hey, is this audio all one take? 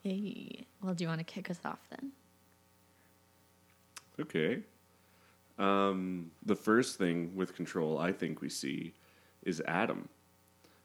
no; 1 cut; at 6.4 s

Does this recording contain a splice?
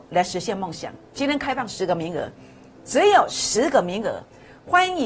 yes; 1 cut; at 1.0 s

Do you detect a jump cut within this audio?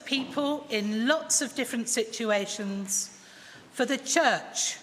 no; 0 cuts

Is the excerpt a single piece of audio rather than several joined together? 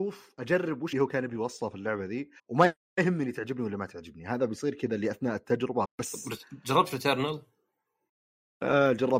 no; 3 cuts; at 0.9 s, 2.4 s, 5.8 s

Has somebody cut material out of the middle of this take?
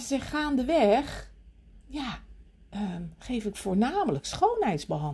yes; 1 cut; at 1.8 s

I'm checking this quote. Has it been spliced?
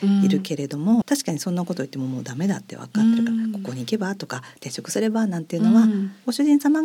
yes; 1 cut; at 1.0 s

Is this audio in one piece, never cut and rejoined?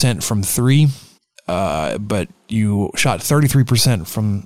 no; 1 cut; at 1.2 s

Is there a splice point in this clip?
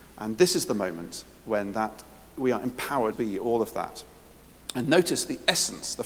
yes; 1 cut; at 3.1 s

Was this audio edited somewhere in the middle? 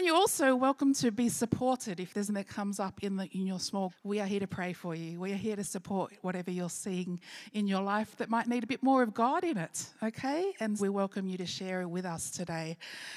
yes; 3 cuts; at 2.3 s, 3.9 s, 10.8 s

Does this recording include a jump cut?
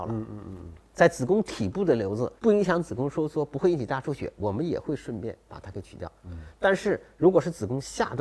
yes; 1 cut; at 2.4 s

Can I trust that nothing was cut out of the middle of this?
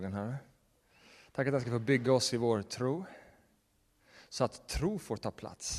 yes; 0 cuts

